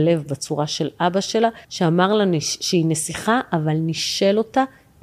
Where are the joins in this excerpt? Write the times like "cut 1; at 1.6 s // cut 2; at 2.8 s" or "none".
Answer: cut 1; at 1.6 s